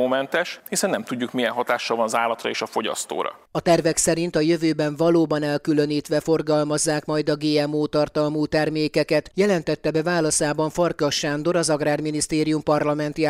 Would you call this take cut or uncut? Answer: uncut